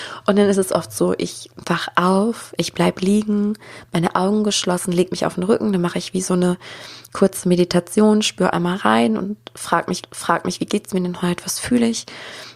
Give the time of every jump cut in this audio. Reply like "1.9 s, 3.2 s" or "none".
10.0 s